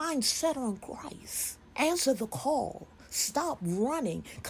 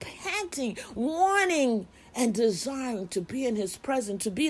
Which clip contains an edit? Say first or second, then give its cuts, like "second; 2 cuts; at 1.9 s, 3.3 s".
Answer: first; 1 cut; at 1.7 s